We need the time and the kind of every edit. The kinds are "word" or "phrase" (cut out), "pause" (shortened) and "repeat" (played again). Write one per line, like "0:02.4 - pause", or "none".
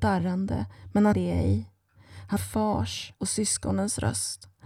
0:01.1 - word
0:02.4 - word
0:03.1 - word